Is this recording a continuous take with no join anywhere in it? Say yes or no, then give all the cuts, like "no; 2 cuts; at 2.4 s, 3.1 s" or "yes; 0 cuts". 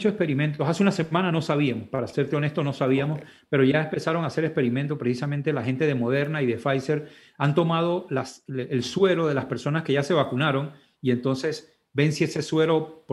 yes; 0 cuts